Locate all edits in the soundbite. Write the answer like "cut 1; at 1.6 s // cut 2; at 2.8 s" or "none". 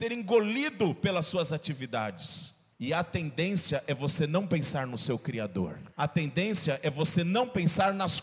cut 1; at 2.7 s // cut 2; at 5.9 s